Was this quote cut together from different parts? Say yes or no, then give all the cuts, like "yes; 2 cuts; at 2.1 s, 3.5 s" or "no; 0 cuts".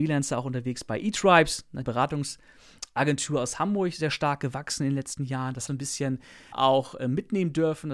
yes; 3 cuts; at 1.8 s, 5.7 s, 6.5 s